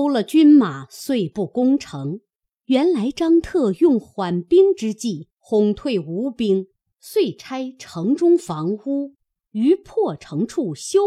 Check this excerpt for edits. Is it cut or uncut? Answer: uncut